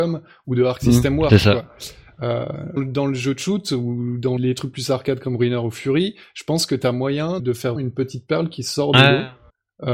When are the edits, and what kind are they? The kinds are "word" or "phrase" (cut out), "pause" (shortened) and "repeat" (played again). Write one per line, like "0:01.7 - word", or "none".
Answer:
0:02.8 - word
0:04.4 - word
0:07.4 - word
0:07.8 - word